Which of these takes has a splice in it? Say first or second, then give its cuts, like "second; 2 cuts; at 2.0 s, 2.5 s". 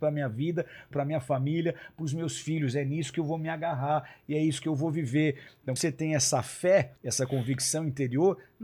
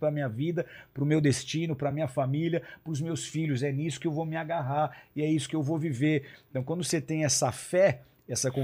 first; 3 cuts; at 0.9 s, 5.8 s, 7.0 s